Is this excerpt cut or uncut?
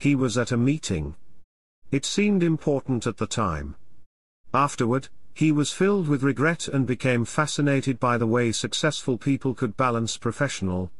uncut